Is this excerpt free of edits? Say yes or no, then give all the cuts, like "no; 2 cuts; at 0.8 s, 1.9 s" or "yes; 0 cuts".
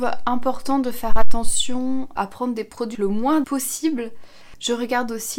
no; 3 cuts; at 2.2 s, 2.9 s, 3.4 s